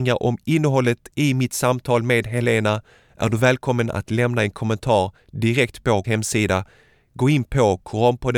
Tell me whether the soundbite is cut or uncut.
cut